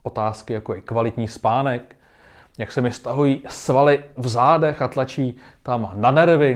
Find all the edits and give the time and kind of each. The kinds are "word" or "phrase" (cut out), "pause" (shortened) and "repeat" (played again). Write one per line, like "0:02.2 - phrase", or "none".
none